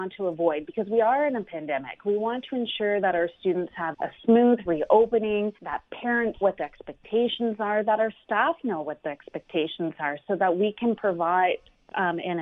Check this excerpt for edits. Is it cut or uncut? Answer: cut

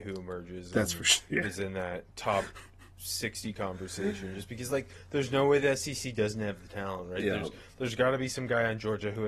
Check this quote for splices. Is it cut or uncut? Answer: uncut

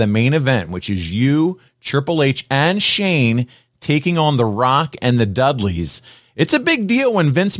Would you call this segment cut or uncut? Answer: uncut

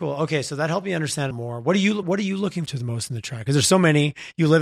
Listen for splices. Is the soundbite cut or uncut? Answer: cut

